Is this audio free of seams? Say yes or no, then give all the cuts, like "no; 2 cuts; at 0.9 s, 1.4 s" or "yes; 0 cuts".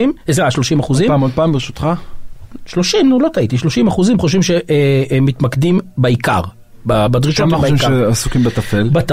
yes; 0 cuts